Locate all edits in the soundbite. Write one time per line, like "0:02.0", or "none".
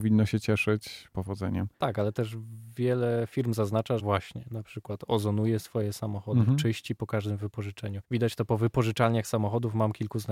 0:01.1
0:04.0
0:08.0